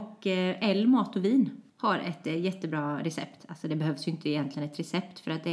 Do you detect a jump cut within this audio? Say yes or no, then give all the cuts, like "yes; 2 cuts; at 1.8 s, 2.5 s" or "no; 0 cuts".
yes; 1 cut; at 1.7 s